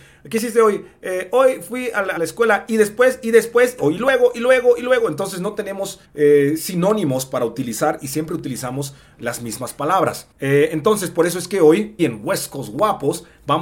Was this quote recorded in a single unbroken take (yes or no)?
no